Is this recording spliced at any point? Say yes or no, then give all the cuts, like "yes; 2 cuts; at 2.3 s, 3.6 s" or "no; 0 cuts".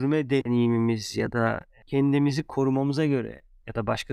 no; 0 cuts